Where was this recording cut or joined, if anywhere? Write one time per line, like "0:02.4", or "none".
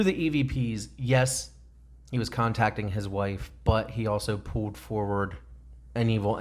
none